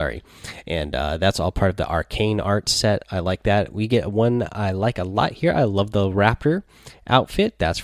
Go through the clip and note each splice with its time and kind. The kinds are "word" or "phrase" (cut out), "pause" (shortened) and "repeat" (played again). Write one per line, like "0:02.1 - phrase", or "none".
none